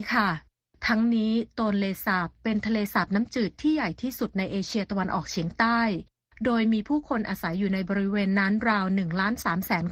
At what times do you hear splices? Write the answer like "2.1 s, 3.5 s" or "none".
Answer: none